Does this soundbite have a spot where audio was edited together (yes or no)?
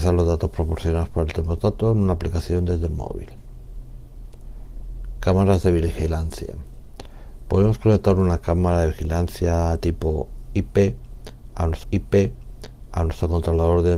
yes